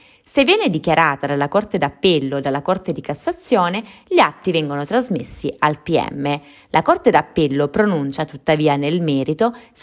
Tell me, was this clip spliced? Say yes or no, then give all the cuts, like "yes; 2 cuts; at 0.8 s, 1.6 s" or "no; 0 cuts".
no; 0 cuts